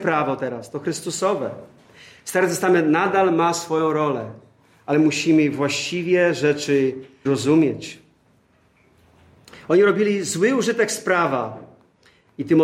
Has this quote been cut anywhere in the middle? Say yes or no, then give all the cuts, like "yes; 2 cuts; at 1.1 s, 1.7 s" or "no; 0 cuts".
yes; 1 cut; at 7.3 s